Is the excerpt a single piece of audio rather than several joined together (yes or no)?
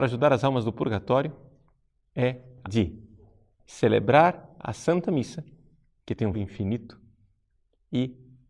no